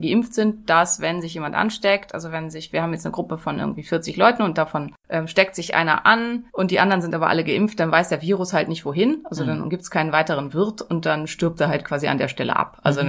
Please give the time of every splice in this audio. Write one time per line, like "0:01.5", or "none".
0:05.0
0:06.5